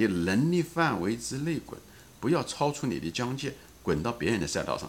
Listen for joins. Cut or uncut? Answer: uncut